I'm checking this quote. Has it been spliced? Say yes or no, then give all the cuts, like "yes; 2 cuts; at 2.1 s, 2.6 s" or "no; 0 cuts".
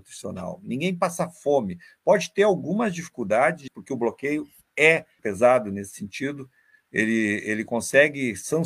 yes; 2 cuts; at 3.7 s, 5.2 s